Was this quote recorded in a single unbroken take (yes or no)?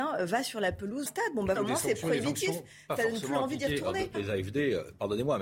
no